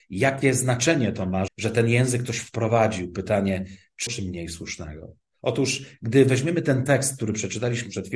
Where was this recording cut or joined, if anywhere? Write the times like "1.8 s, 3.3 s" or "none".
1.5 s, 4.1 s